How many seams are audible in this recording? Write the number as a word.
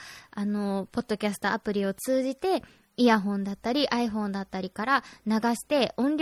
zero